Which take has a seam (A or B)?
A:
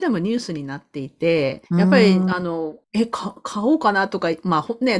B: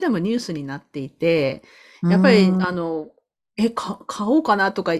A